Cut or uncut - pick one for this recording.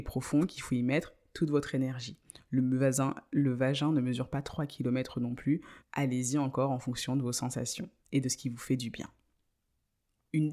cut